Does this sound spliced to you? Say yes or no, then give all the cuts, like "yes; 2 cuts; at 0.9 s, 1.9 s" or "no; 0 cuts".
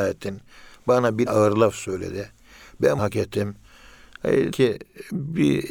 yes; 3 cuts; at 1.3 s, 3.0 s, 4.5 s